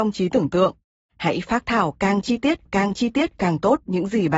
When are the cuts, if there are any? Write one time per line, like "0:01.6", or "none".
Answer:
0:02.7